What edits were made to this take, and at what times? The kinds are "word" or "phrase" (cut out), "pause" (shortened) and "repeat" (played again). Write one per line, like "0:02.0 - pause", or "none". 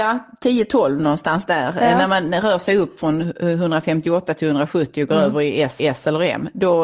0:05.8 - repeat